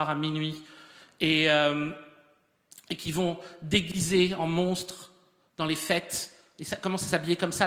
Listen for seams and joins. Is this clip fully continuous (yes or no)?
yes